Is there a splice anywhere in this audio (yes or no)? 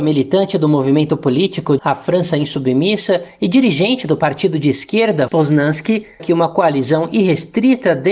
yes